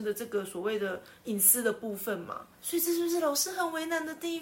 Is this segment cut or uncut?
cut